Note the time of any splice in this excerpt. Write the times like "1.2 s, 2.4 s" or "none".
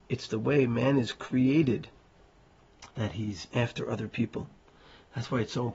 2.9 s, 3.5 s